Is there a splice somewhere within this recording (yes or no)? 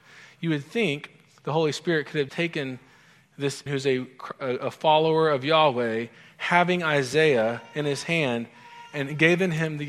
yes